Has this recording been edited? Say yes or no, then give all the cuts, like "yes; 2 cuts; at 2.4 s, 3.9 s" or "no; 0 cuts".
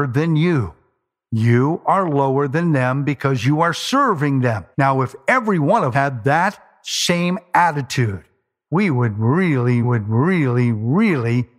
yes; 4 cuts; at 4.7 s, 5.9 s, 8.7 s, 9.8 s